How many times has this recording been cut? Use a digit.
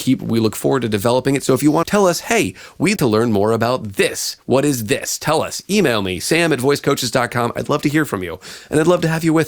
2